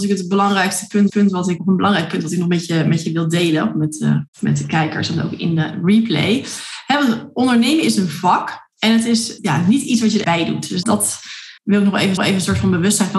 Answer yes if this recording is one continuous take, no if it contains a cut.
no